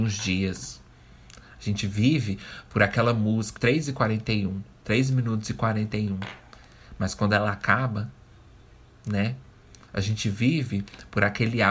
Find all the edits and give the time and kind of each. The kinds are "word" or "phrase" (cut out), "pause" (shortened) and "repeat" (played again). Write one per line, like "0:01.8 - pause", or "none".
0:03.6 - word